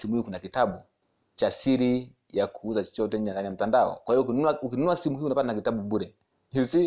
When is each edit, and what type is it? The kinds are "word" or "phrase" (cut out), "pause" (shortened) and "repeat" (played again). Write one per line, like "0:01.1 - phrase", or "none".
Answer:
none